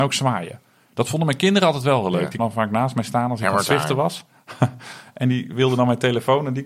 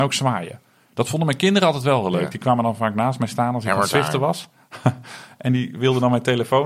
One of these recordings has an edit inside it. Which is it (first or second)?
first